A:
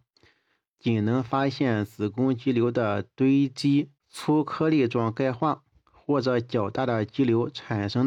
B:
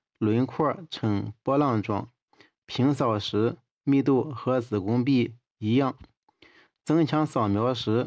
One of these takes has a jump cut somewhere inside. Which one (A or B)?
A